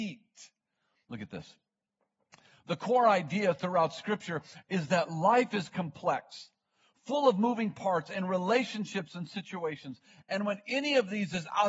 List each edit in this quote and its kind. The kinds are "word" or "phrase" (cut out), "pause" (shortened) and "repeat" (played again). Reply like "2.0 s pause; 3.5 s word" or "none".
none